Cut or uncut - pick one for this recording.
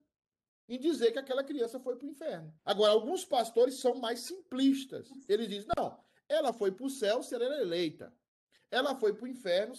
cut